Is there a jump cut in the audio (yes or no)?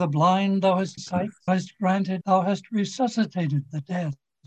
yes